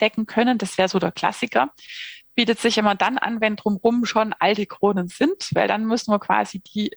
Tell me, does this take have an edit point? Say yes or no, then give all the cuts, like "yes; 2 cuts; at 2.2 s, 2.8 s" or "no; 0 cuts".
no; 0 cuts